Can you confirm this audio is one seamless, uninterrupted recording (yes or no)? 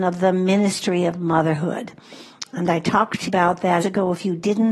no